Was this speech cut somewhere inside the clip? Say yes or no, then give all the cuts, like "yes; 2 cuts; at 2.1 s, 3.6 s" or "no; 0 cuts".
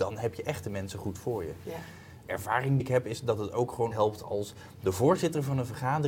yes; 3 cuts; at 2.3 s, 2.8 s, 3.9 s